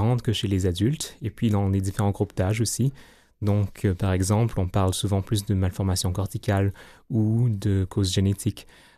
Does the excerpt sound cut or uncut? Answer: uncut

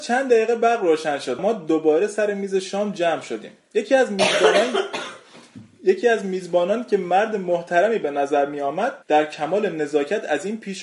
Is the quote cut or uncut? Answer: cut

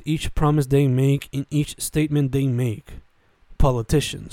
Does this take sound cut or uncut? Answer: uncut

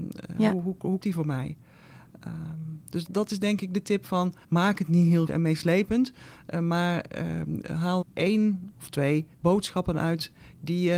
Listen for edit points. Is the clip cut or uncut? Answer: cut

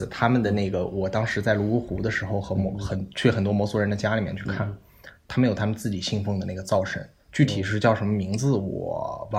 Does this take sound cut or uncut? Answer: cut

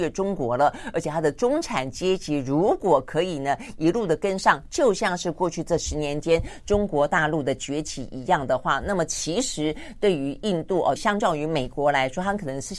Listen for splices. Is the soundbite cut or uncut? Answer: cut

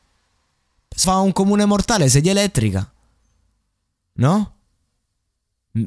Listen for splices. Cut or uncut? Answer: cut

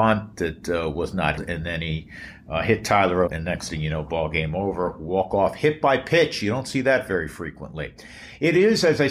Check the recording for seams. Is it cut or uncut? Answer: cut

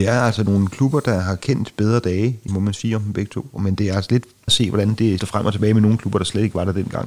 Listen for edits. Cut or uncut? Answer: cut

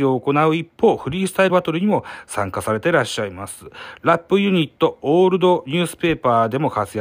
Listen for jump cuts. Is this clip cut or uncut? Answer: cut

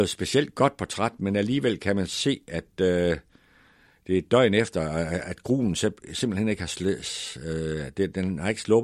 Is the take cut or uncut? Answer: uncut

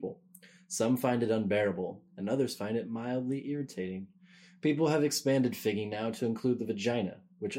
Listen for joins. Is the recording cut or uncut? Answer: uncut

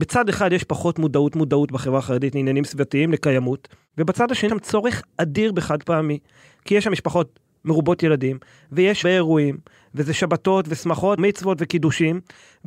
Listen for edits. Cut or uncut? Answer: cut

